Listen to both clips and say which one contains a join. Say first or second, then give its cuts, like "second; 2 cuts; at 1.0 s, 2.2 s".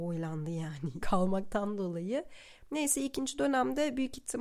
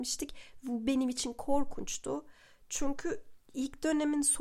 first; 1 cut; at 1.0 s